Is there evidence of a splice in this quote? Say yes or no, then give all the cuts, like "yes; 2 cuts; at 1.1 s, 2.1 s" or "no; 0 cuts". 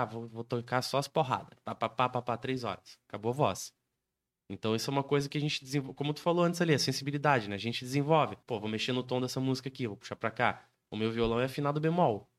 yes; 1 cut; at 8.4 s